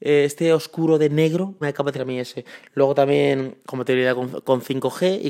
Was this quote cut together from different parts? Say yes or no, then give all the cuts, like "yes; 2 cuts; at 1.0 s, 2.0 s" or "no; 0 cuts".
yes; 3 cuts; at 1.6 s, 1.9 s, 3.6 s